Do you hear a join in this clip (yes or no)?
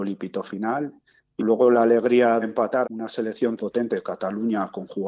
yes